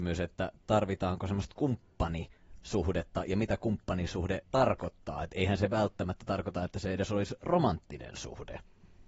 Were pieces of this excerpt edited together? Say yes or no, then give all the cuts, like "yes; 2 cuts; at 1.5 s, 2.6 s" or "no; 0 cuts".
yes; 1 cut; at 4.4 s